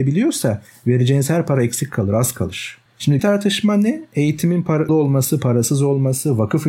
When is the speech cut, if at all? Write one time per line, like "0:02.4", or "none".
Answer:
0:03.2
0:04.9